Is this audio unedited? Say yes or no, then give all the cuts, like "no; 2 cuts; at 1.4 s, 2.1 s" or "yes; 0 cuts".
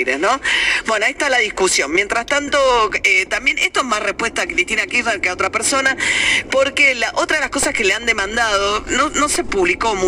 yes; 0 cuts